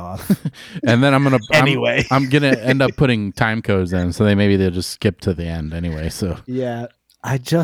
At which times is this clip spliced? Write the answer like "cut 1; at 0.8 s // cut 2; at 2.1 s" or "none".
none